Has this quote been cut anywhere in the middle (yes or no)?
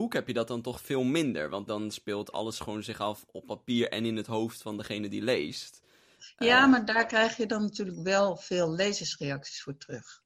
yes